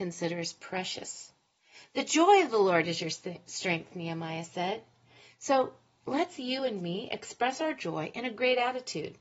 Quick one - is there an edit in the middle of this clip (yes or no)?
no